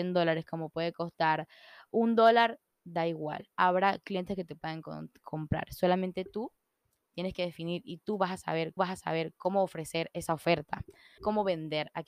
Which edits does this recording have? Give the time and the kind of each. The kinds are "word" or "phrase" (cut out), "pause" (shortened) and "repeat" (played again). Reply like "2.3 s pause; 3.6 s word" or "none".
8.8 s repeat; 11.2 s word